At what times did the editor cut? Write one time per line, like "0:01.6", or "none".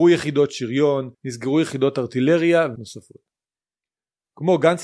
0:01.1
0:02.8